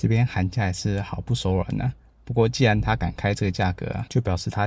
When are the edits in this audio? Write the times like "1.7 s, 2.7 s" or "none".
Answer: none